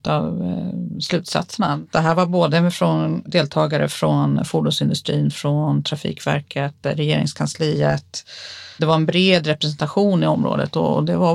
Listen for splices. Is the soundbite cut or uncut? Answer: uncut